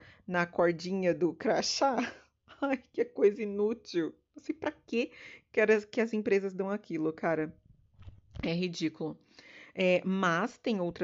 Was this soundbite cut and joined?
no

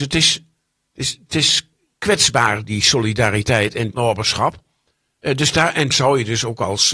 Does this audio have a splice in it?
yes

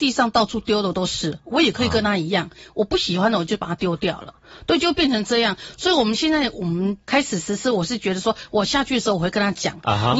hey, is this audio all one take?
no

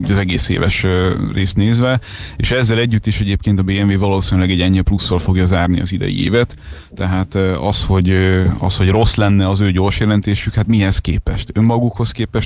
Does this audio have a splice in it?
no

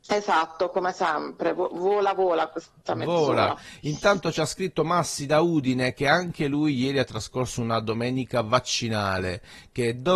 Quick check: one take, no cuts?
yes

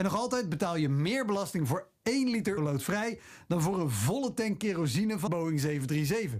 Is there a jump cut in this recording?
yes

